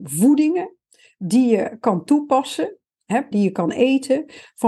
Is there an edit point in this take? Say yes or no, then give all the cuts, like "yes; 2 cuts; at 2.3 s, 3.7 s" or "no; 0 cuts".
yes; 1 cut; at 3.3 s